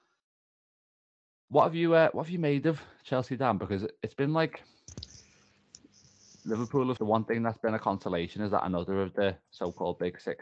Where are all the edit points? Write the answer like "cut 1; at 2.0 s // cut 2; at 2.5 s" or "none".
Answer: cut 1; at 7.0 s